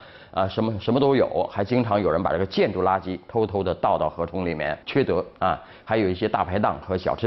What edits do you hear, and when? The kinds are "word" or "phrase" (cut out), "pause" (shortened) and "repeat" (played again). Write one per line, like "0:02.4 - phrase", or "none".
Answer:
0:04.8 - pause